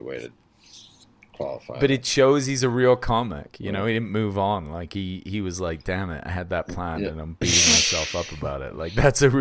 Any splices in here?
no; 0 cuts

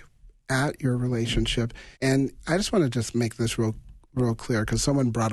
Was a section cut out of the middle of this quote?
yes; 1 cut; at 1.9 s

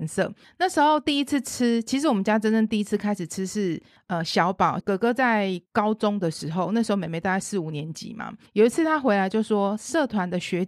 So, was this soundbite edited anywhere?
yes; 2 cuts; at 4.8 s, 5.7 s

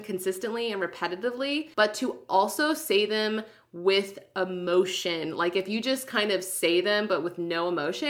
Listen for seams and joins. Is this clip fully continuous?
no; 1 cut; at 1.7 s

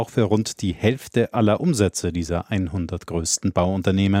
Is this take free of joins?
yes; 0 cuts

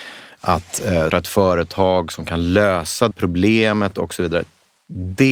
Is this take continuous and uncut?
no; 2 cuts; at 1.1 s, 3.1 s

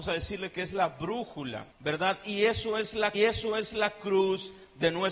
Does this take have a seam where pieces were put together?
yes; 2 cuts; at 1.7 s, 3.1 s

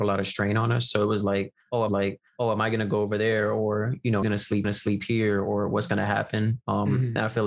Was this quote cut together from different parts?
yes; 3 cuts; at 1.9 s, 4.2 s, 4.6 s

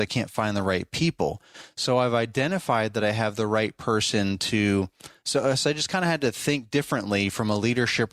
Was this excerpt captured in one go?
yes; 0 cuts

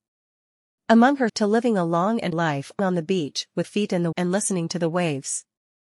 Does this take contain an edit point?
yes; 5 cuts; at 1.3 s, 2.3 s, 2.8 s, 3.6 s, 4.1 s

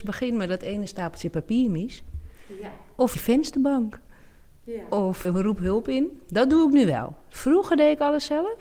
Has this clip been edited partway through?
yes; 2 cuts; at 3.1 s, 5.2 s

